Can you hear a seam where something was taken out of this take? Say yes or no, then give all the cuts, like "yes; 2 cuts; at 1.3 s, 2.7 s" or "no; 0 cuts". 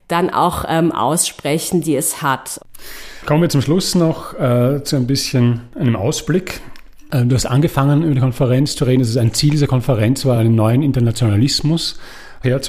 no; 0 cuts